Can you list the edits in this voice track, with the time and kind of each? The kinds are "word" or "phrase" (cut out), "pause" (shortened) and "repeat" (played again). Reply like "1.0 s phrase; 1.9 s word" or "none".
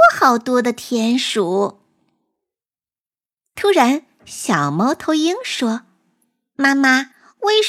none